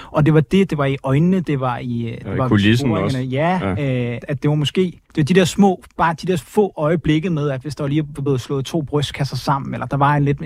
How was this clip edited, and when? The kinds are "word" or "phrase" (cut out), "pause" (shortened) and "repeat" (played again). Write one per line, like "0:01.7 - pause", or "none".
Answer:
0:04.2 - word
0:05.0 - pause